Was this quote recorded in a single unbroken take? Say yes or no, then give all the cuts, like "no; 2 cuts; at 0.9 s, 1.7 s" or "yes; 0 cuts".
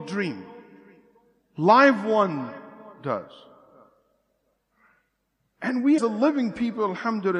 no; 1 cut; at 6.0 s